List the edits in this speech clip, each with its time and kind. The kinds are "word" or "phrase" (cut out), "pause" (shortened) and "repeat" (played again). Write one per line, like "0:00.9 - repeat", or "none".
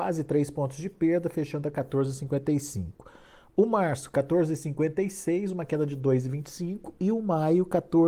none